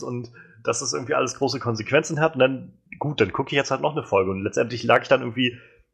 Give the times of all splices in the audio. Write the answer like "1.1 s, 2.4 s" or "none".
2.9 s

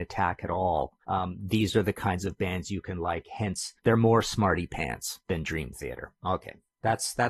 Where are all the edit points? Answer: 1.0 s, 3.8 s, 5.2 s

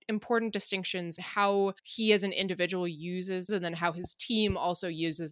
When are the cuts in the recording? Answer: 1.2 s, 1.8 s, 3.5 s

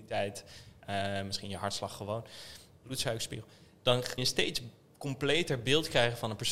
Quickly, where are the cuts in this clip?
4.2 s

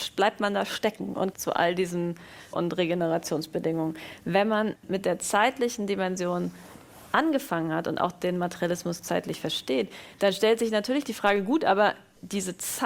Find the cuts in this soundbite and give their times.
1.3 s, 2.5 s

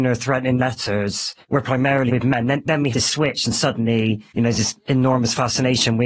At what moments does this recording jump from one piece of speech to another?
1.4 s, 2.1 s, 2.9 s, 4.3 s

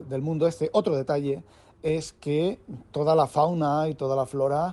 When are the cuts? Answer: none

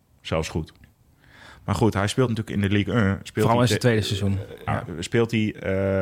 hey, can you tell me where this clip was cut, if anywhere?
4.7 s

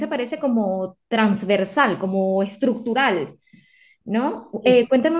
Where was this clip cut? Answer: 1.0 s

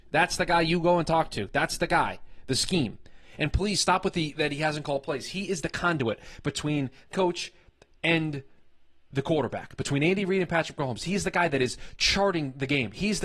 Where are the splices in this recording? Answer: 7.1 s

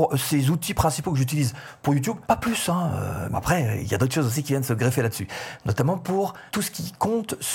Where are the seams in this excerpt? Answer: 2.2 s, 3.3 s, 6.5 s

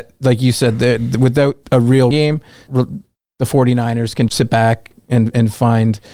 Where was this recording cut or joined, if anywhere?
1.6 s, 2.1 s, 2.7 s, 4.3 s

